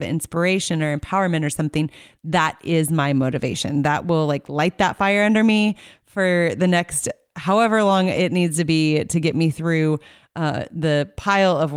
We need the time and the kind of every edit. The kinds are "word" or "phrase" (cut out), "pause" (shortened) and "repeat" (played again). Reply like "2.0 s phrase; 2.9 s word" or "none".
none